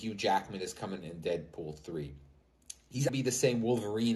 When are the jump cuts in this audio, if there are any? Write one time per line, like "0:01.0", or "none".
0:01.0
0:03.1